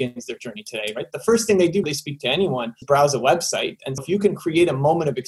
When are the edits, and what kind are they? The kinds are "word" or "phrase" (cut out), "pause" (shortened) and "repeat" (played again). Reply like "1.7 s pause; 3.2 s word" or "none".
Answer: 1.8 s word; 2.8 s word; 4.0 s word